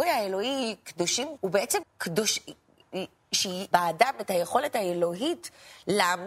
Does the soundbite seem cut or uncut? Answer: cut